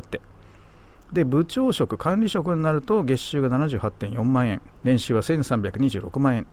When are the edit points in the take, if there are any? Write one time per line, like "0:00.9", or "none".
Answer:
0:04.8